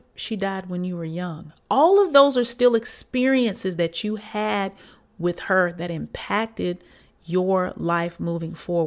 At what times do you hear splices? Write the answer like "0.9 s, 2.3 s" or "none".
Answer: none